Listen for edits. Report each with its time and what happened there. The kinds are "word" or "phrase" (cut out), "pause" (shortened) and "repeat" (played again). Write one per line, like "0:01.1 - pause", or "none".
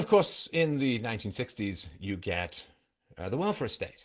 none

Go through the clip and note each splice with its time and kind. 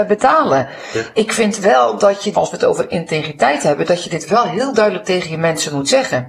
0:02.3 - word

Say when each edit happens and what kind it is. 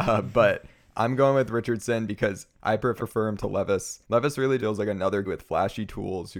0:02.5 - pause
0:03.0 - word
0:04.0 - pause
0:04.6 - word
0:05.2 - word

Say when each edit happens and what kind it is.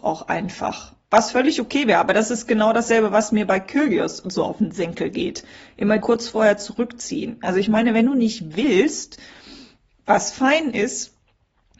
0:01.0 - pause
0:06.0 - phrase

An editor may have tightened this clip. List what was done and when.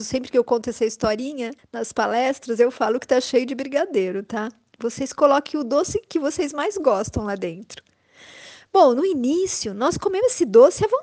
0:01.6 - pause

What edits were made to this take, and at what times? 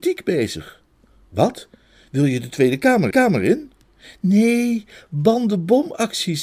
0:03.1 - repeat

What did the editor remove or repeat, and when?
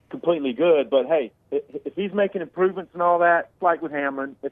0:01.4 - pause
0:03.6 - phrase

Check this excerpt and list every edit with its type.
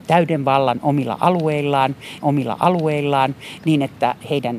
0:02.2 - repeat

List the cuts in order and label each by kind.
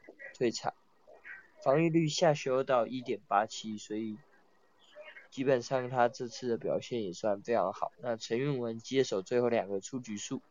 0:05.2 - pause

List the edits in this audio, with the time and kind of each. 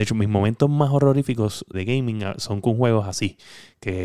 0:01.7 - word

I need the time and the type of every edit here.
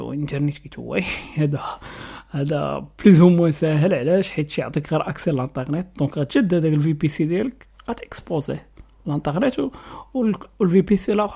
none

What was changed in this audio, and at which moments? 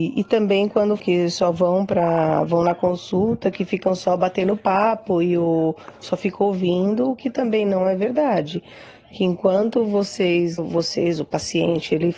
0:01.0 - word
0:06.0 - word
0:10.6 - word

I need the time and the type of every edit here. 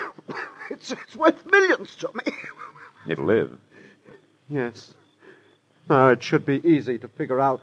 0:03.2 - word

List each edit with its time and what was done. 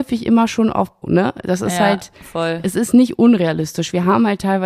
0:01.0 - phrase

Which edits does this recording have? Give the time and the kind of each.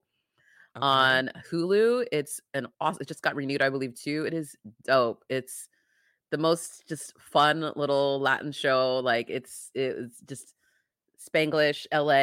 0:02.7 - pause

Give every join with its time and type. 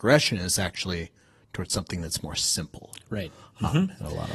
none

